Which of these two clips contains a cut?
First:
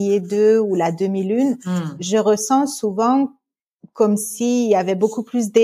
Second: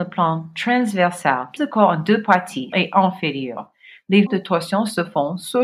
second; 3 cuts; at 1.6 s, 2.7 s, 4.3 s

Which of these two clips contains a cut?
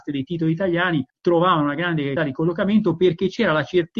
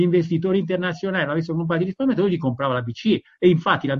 first; 2 cuts; at 1.1 s, 2.2 s

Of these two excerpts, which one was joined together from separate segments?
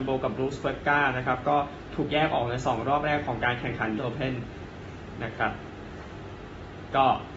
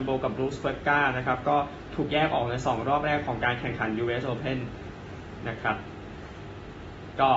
first; 1 cut; at 4.0 s

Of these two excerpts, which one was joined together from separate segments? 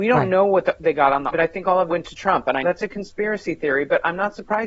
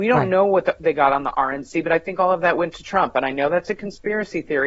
first; 3 cuts; at 1.3 s, 1.9 s, 2.6 s

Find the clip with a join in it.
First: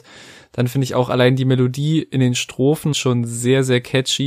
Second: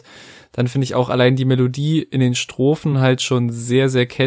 first; 1 cut; at 2.9 s

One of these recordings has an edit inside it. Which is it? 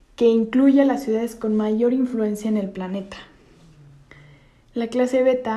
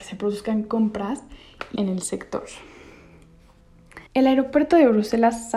second; 2 cuts; at 1.8 s, 4.1 s

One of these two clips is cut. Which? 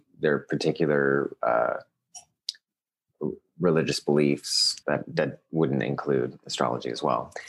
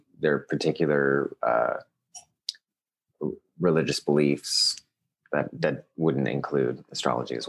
first; 1 cut; at 4.8 s

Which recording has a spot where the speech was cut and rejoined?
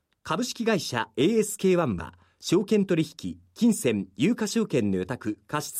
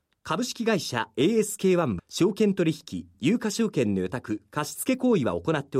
second; 2 cuts; at 2.0 s, 3.1 s

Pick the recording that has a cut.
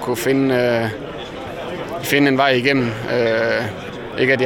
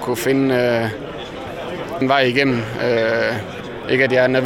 second; 1 cut; at 2.0 s

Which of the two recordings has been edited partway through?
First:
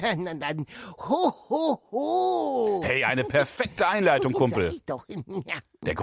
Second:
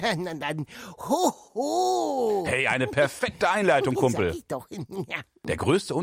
second; 1 cut; at 1.5 s

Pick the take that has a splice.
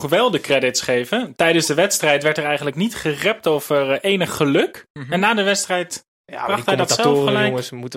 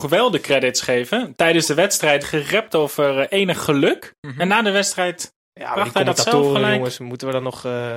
second; 1 cut; at 2.2 s

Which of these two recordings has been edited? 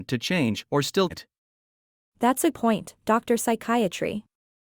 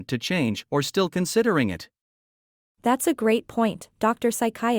first; 2 cuts; at 1.1 s, 2.5 s

